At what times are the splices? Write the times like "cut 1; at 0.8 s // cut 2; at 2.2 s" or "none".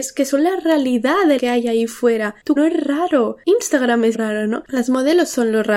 cut 1; at 1.4 s // cut 2; at 2.6 s // cut 3; at 4.1 s